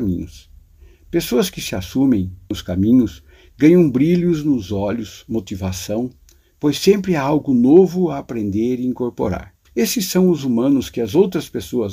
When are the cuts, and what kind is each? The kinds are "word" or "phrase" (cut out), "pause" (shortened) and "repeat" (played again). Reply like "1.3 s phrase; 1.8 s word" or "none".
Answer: 2.5 s word; 9.7 s pause